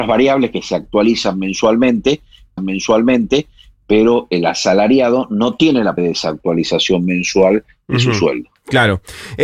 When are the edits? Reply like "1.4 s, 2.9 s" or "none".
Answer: 2.6 s, 6.0 s